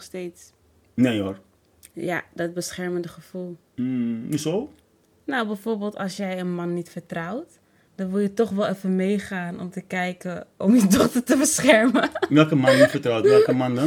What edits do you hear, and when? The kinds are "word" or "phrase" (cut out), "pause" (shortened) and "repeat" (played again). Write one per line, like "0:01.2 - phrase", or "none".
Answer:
none

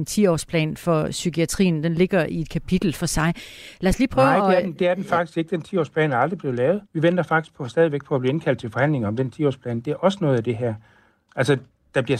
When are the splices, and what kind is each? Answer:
0:06.8 - pause

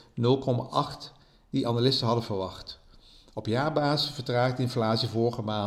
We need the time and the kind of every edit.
none

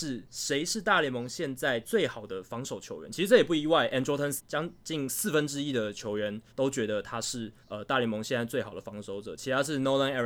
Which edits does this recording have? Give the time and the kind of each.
0:04.4 - word
0:06.5 - pause
0:07.6 - pause

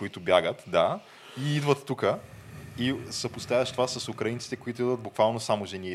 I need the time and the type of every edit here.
none

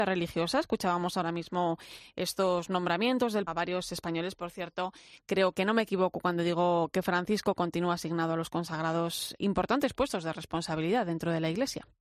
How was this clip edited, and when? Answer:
0:03.5 - word
0:05.5 - word
0:09.4 - word

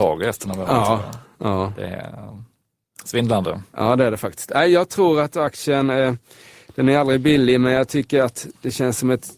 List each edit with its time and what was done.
none

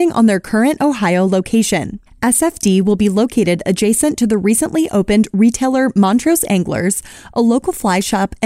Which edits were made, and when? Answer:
none

